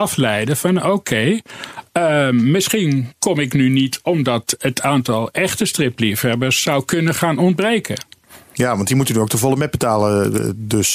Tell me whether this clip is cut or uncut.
uncut